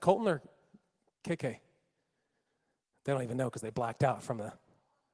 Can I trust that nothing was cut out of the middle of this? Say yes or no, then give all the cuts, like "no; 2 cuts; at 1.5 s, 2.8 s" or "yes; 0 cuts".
yes; 0 cuts